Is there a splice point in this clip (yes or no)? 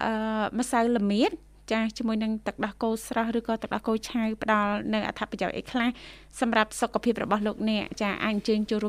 no